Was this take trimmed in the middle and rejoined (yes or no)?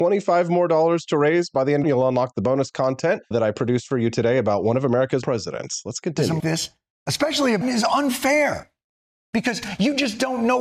yes